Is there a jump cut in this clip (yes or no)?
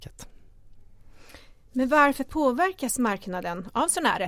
no